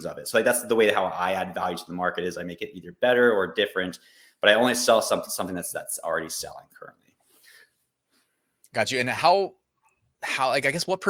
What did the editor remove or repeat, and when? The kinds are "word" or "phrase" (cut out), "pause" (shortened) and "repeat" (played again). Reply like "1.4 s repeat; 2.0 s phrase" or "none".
none

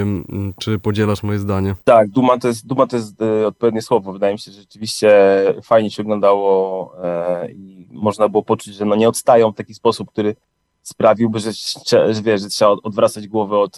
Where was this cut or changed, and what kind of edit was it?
1.8 s pause; 10.4 s pause

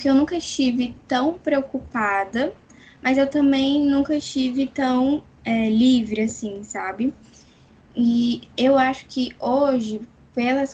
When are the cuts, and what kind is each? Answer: none

